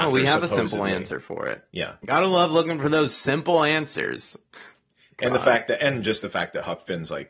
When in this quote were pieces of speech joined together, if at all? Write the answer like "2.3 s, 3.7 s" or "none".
none